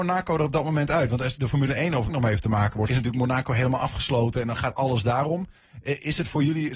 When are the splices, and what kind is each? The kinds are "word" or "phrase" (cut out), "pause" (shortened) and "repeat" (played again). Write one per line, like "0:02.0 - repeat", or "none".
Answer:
0:01.4 - word
0:02.1 - phrase
0:02.9 - phrase